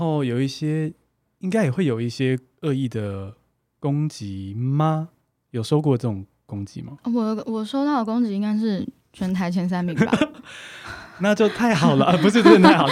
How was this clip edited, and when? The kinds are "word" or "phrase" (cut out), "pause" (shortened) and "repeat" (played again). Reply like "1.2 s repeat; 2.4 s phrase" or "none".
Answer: none